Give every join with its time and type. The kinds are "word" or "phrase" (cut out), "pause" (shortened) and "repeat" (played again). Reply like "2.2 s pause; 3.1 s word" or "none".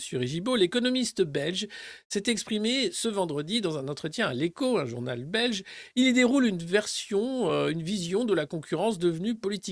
none